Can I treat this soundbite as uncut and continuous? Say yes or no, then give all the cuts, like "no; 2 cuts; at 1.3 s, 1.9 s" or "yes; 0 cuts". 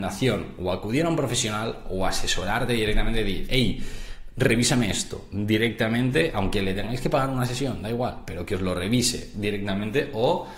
yes; 0 cuts